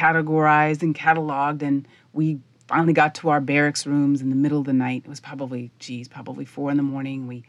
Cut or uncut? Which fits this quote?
uncut